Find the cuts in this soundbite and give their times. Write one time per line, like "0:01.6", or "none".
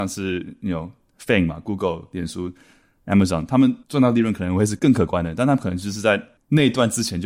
0:03.8

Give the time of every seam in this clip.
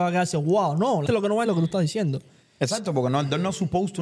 0:01.1
0:01.5

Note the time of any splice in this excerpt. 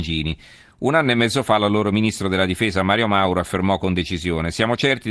none

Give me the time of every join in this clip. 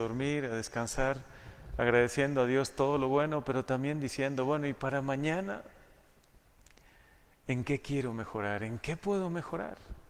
none

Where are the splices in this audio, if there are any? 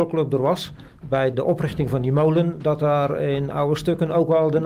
0:01.3

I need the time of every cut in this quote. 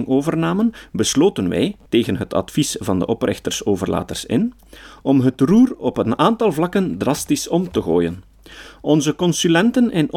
0:01.9

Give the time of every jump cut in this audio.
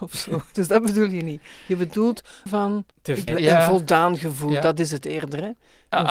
0:02.5
0:02.9
0:03.3

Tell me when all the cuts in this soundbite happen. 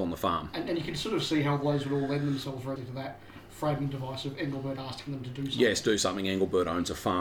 0:02.8

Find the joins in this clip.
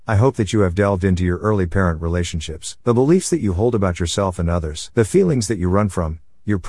0:02.8
0:04.9

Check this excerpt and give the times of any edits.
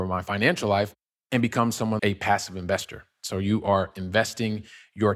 0:02.0

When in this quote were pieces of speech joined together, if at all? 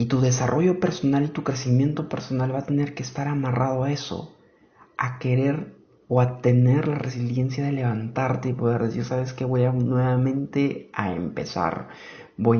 none

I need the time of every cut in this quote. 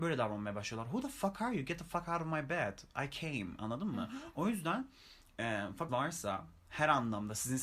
0:05.9

